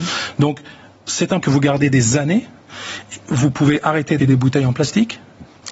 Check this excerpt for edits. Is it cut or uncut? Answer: cut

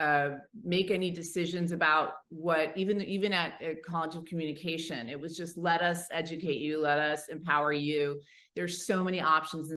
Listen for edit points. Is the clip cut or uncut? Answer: uncut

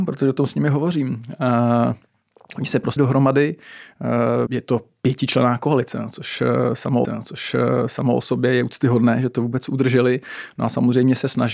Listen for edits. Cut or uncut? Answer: cut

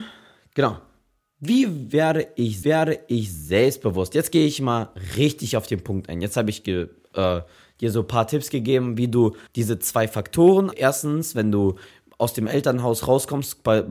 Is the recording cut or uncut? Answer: cut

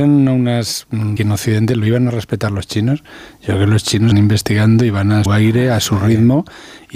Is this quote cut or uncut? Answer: cut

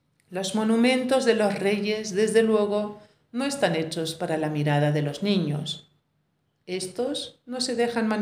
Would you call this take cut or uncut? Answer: uncut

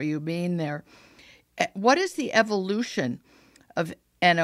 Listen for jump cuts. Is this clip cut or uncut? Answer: uncut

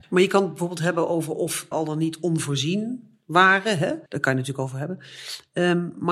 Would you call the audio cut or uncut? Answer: cut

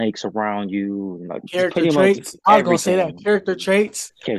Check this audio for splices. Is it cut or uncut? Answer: uncut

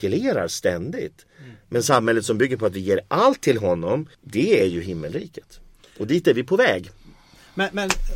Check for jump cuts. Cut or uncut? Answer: cut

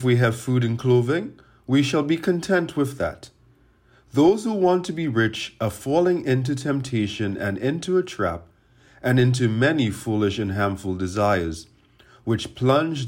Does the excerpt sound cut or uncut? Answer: uncut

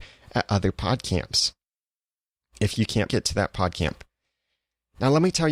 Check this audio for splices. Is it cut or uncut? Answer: cut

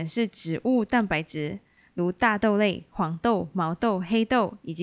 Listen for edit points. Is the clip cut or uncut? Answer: uncut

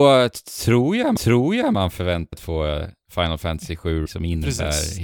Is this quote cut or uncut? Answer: cut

